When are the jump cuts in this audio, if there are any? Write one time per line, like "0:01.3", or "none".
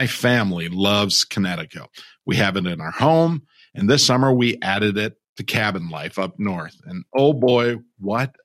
none